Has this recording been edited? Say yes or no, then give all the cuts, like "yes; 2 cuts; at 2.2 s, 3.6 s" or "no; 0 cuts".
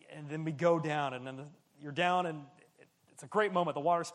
no; 0 cuts